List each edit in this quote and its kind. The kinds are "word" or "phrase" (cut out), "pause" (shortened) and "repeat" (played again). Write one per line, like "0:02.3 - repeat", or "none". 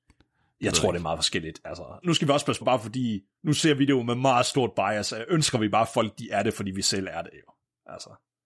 0:02.0 - word
0:02.6 - word

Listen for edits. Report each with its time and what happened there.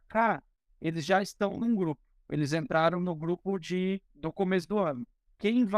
0:04.1 - pause

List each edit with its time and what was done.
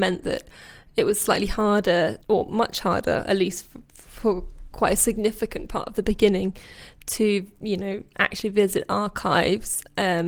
0:02.2 - pause

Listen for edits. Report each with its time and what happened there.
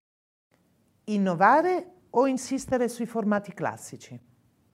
none

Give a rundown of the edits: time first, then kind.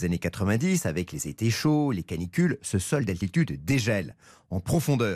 none

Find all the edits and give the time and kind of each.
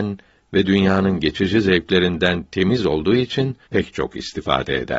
0:03.7 - word

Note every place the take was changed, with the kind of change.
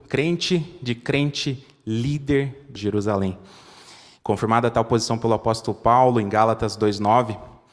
0:02.8 - word

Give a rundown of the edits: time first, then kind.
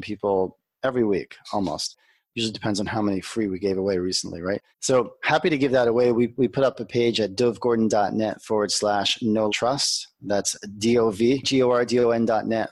0:04.7 - pause
0:09.5 - word

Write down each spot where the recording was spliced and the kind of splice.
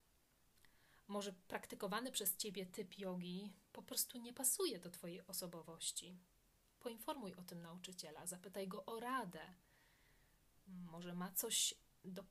none

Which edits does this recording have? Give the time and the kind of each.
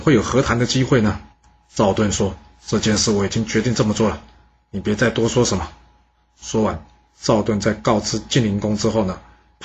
0:01.3 - pause

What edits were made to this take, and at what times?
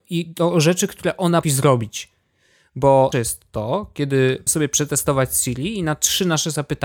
0:01.4 - word
0:03.1 - word
0:04.5 - word

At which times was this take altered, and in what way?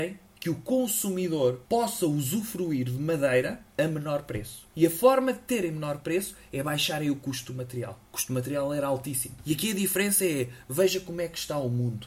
0:08.1 - pause

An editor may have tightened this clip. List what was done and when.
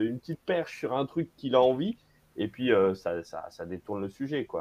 none

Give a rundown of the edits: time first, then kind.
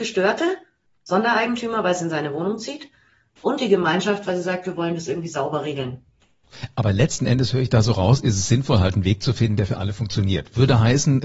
none

